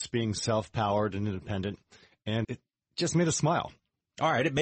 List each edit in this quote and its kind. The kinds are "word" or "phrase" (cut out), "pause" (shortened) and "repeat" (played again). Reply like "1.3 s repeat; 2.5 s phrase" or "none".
2.4 s word